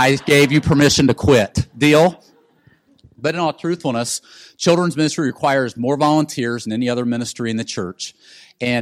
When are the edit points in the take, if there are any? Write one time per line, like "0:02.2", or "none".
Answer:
none